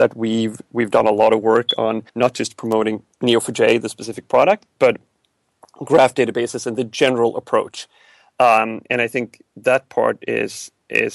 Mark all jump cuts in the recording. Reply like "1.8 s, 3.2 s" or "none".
2.1 s, 3.1 s